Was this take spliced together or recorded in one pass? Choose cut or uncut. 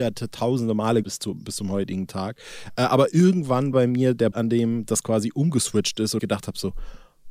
cut